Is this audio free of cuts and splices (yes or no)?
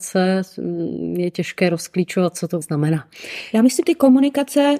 no